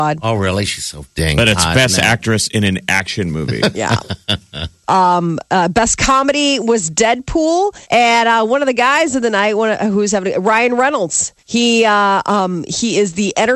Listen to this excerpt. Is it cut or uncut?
cut